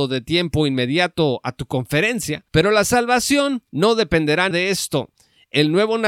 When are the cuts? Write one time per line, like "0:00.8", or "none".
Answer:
0:02.5
0:03.7
0:04.5